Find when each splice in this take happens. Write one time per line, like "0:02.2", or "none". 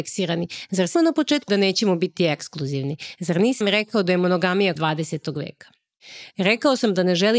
0:00.9
0:01.5
0:03.6
0:04.8